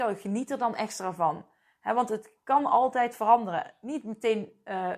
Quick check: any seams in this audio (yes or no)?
no